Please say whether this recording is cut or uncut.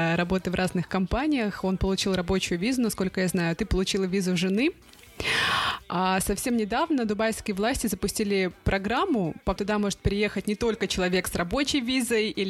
cut